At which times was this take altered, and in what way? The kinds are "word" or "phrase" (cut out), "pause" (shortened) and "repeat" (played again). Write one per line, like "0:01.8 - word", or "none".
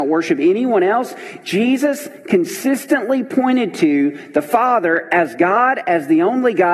none